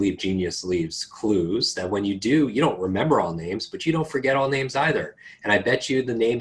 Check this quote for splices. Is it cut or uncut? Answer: uncut